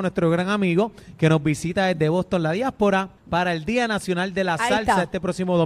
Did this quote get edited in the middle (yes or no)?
yes